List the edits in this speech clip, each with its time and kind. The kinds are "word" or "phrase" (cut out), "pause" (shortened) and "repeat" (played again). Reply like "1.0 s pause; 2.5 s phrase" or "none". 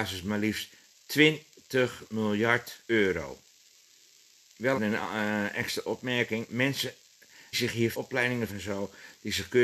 2.8 s pause; 4.7 s word; 7.5 s phrase; 7.9 s word; 8.5 s phrase